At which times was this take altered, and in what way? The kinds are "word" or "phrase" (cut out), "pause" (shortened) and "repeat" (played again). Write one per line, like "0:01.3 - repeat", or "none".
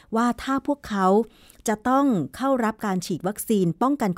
none